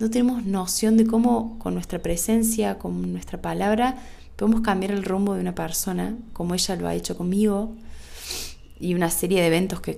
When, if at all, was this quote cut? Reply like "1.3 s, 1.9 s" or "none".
none